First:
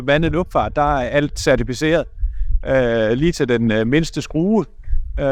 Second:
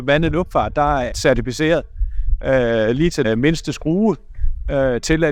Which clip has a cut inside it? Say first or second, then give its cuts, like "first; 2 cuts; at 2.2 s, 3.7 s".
second; 2 cuts; at 1.1 s, 3.2 s